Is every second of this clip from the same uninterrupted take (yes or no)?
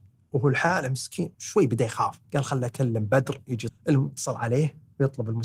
no